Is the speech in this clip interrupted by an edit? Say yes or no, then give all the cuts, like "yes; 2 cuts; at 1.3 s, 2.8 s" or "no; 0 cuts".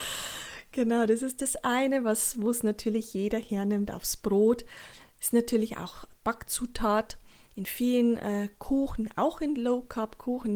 no; 0 cuts